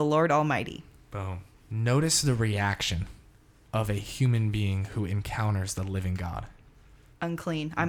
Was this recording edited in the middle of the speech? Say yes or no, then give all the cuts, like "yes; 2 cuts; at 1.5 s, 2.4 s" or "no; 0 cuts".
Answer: no; 0 cuts